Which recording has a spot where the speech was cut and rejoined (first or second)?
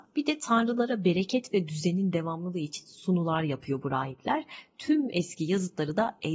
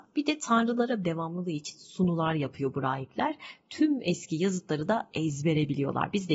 second